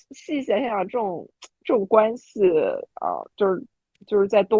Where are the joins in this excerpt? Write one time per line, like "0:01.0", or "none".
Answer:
none